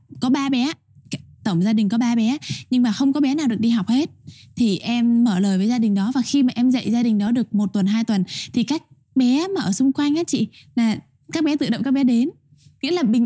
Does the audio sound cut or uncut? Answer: uncut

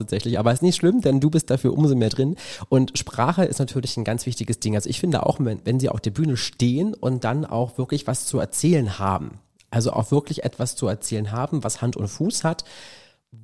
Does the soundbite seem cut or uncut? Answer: uncut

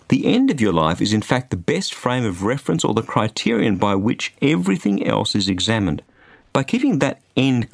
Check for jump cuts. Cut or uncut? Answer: uncut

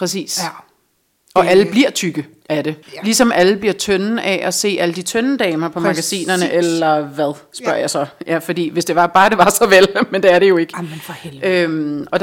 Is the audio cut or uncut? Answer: cut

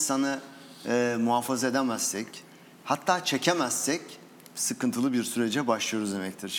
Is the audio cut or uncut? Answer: uncut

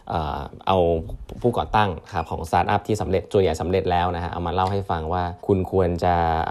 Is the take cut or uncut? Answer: cut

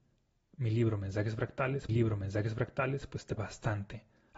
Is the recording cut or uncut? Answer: cut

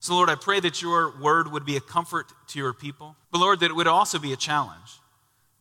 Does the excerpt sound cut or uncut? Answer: cut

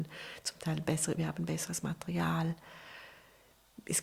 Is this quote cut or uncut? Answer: cut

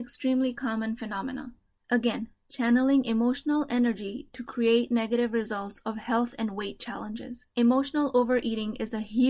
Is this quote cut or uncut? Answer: uncut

